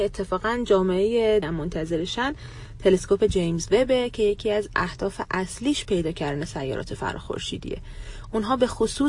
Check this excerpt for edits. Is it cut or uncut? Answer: cut